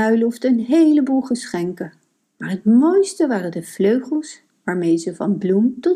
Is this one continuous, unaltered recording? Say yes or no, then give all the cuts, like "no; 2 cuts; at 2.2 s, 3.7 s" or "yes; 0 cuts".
yes; 0 cuts